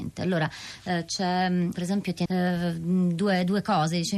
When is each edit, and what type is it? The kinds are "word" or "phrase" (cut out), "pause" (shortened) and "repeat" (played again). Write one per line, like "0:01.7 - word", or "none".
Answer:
0:01.7 - word
0:02.3 - word